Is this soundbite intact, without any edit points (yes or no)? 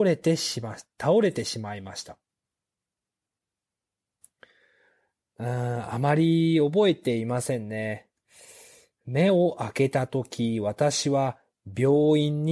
yes